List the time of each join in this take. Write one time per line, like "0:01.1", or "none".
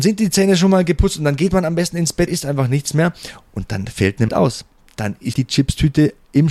0:02.3
0:04.3
0:05.3